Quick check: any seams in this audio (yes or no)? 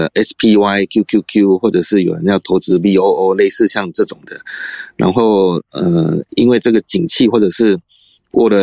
no